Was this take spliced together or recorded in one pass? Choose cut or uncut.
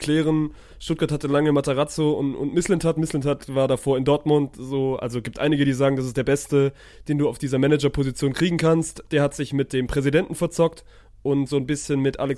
uncut